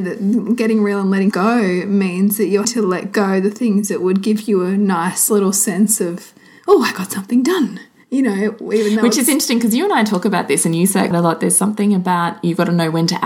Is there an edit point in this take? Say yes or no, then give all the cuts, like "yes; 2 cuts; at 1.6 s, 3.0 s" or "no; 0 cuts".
yes; 3 cuts; at 1.3 s, 2.6 s, 11.1 s